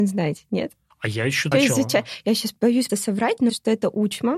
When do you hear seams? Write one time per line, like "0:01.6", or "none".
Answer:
0:01.5
0:02.9
0:03.5